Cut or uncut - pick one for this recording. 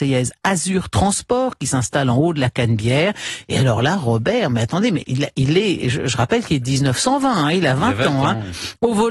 uncut